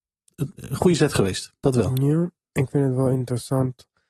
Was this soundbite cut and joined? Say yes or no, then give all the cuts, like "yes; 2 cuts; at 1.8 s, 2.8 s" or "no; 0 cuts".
no; 0 cuts